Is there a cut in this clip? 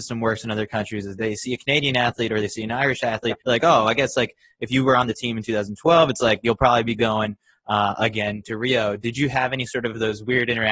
yes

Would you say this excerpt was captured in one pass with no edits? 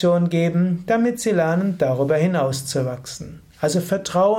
yes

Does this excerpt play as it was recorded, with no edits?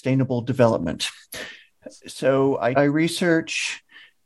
no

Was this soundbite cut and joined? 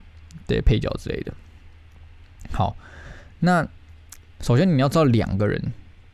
no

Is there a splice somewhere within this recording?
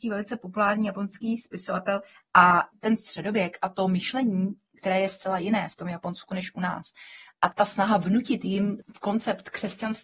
no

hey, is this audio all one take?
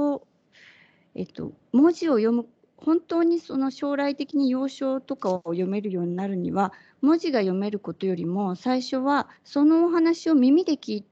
no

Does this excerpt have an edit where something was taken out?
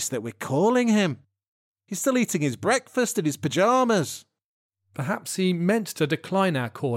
no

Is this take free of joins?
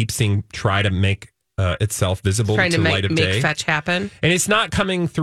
no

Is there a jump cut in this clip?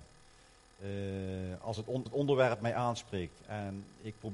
yes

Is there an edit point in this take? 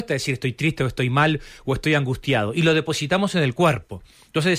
no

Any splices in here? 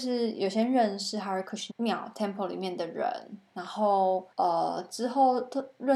yes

